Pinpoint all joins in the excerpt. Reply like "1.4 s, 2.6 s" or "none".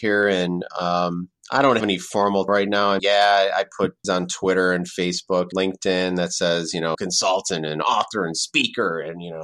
1.8 s, 2.5 s, 3.0 s, 4.0 s, 5.5 s, 6.9 s